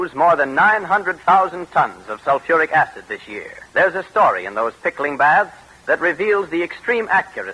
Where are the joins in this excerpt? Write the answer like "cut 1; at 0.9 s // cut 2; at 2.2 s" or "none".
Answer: cut 1; at 3.7 s